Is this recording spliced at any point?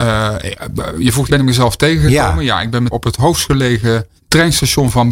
yes; 3 cuts; at 1.3 s, 2.9 s, 4.2 s

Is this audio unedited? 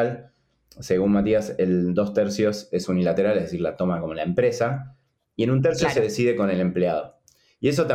yes; 0 cuts

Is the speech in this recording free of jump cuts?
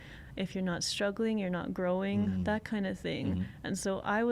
yes; 0 cuts

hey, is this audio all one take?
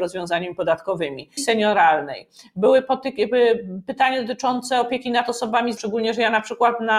no; 2 cuts; at 1.4 s, 5.8 s

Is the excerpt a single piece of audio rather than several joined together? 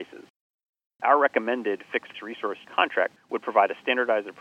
no; 3 cuts; at 2.1 s, 2.6 s, 3.2 s

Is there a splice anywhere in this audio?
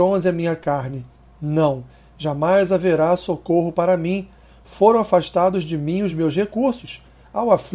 no; 0 cuts

